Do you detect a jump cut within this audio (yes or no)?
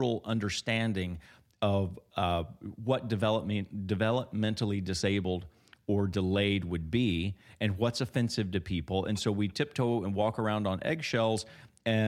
no